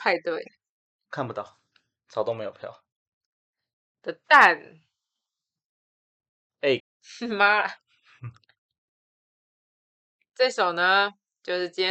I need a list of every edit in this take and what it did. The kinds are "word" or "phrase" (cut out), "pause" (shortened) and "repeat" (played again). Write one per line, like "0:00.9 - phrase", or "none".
0:06.8 - word